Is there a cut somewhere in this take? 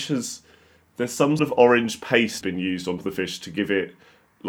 yes; 3 cuts; at 1.4 s, 2.4 s, 3.0 s

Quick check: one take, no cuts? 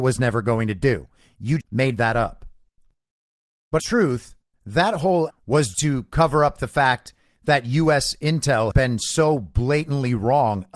no; 5 cuts; at 1.6 s, 3.8 s, 5.3 s, 5.7 s, 8.7 s

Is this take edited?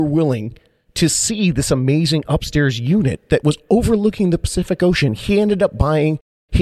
no; 0 cuts

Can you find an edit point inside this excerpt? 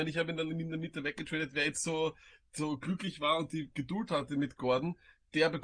no; 0 cuts

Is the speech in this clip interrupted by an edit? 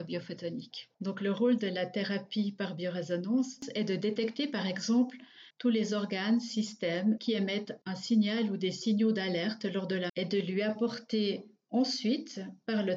yes; 5 cuts; at 0.9 s, 5.5 s, 7.2 s, 7.8 s, 10.1 s

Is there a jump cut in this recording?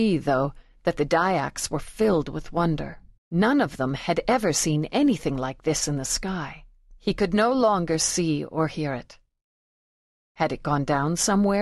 yes; 2 cuts; at 3.2 s, 7.0 s

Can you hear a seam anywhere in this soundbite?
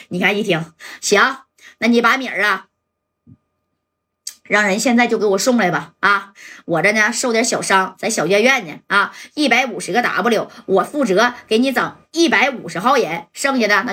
no; 0 cuts

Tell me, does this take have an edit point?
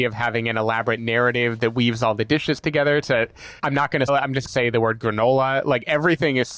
yes; 3 cuts; at 3.6 s, 4.1 s, 4.5 s

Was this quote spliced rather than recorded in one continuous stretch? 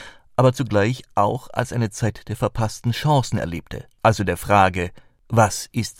no; 0 cuts

